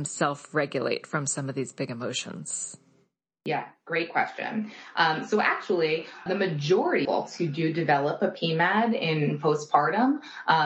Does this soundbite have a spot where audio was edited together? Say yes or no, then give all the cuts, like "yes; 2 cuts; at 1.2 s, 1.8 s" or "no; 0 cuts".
yes; 2 cuts; at 6.3 s, 7.0 s